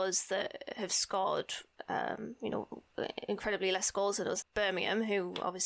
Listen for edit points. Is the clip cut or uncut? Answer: cut